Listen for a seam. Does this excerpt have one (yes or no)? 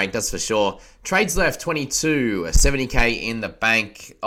no